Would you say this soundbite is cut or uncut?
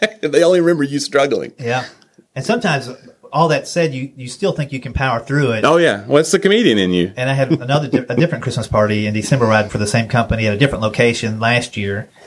cut